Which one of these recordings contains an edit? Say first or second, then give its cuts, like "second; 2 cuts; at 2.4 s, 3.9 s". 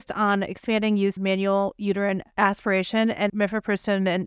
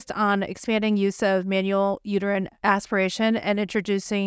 first; 2 cuts; at 1.2 s, 3.3 s